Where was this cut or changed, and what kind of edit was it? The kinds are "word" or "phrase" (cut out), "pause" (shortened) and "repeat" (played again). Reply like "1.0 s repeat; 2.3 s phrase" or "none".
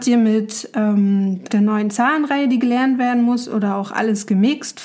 1.5 s word